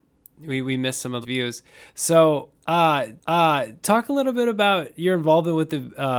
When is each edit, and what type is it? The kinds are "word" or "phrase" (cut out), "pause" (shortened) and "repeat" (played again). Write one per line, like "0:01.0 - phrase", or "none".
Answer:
0:01.2 - word
0:03.2 - repeat